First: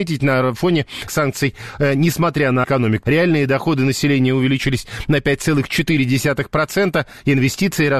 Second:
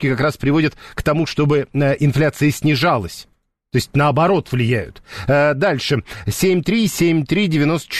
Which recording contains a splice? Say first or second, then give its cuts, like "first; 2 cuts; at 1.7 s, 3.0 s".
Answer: first; 3 cuts; at 1.1 s, 2.6 s, 3.0 s